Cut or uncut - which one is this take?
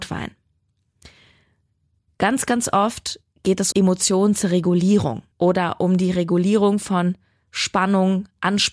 cut